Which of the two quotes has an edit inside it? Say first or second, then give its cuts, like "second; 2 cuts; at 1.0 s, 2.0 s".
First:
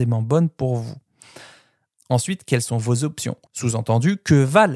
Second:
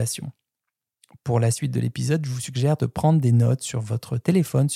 first; 1 cut; at 3.5 s